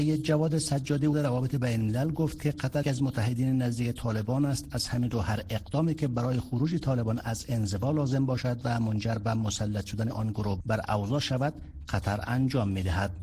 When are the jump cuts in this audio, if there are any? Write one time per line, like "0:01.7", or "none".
0:01.1
0:02.8